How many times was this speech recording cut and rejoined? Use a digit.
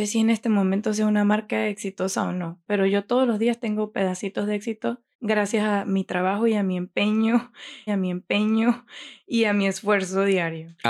2